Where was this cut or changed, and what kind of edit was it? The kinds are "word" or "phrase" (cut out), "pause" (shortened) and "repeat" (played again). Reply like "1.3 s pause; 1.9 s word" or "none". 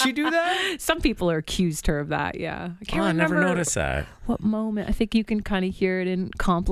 none